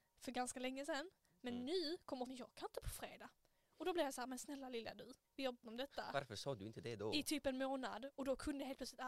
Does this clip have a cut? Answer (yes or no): yes